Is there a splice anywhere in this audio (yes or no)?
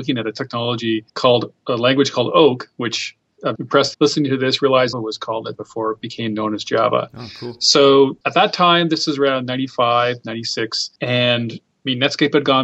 yes